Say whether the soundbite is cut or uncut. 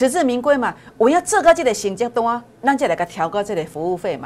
cut